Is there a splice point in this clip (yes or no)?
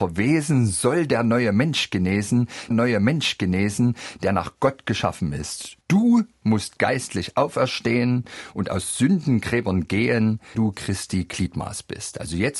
yes